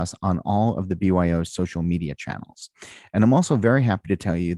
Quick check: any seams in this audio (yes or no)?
no